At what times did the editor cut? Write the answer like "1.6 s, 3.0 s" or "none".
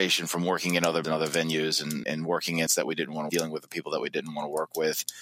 1.0 s, 2.0 s, 2.7 s, 3.3 s